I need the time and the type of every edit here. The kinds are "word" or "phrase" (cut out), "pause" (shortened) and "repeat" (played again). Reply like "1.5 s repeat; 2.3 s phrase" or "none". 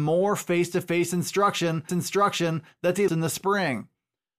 1.9 s repeat; 3.1 s word